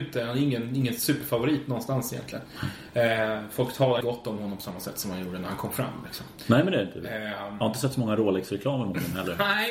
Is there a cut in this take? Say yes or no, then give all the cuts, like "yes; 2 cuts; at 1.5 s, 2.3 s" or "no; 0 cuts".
yes; 1 cut; at 4.0 s